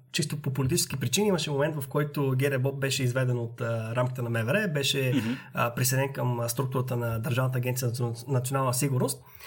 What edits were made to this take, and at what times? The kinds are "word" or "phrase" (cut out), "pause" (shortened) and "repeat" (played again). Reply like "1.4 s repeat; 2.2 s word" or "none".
none